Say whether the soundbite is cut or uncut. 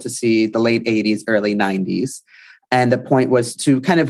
uncut